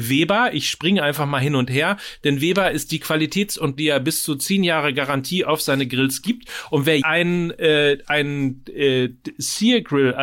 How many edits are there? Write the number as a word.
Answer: two